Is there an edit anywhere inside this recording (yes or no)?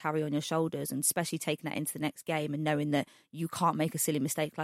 no